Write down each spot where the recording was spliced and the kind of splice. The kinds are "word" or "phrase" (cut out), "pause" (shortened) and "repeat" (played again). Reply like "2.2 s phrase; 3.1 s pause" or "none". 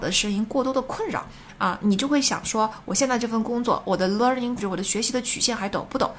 4.6 s word

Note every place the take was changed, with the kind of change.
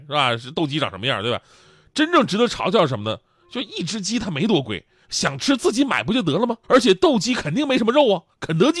6.6 s pause

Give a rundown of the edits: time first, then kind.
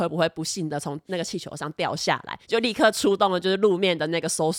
2.4 s pause

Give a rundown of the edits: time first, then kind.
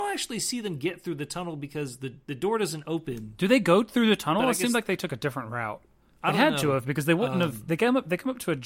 2.2 s pause

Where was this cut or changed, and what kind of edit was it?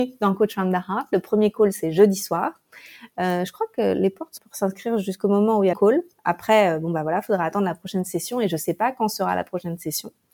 4.4 s phrase; 5.7 s phrase

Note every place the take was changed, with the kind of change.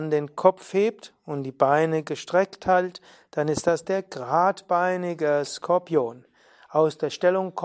none

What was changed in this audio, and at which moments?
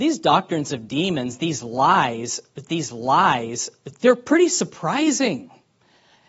2.7 s repeat

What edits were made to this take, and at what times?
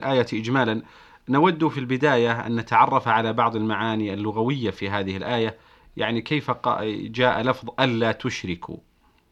none

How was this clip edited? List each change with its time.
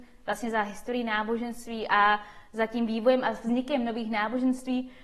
none

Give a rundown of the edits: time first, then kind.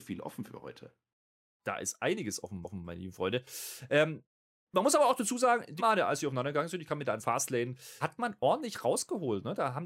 2.6 s repeat; 5.8 s word; 7.2 s phrase; 8.0 s word

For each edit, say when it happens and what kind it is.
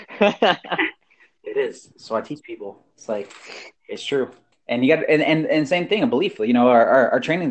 2.9 s pause; 3.8 s pause; 4.5 s pause

